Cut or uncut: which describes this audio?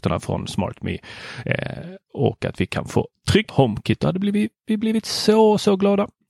cut